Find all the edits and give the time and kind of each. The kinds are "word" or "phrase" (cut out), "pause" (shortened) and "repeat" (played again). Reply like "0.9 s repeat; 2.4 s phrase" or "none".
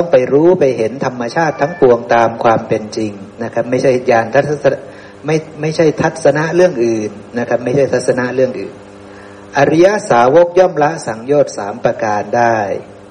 3.3 s pause; 7.3 s pause